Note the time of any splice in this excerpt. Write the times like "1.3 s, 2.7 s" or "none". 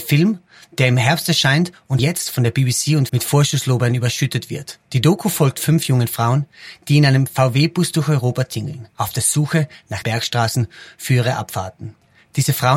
2.0 s, 3.1 s, 4.8 s, 8.9 s, 10.0 s